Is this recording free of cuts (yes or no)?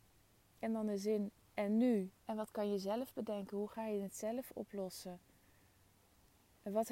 no